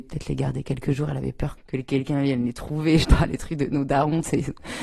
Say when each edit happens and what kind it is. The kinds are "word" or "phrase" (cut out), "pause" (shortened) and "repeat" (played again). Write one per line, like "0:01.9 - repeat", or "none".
0:01.6 - word
0:03.0 - word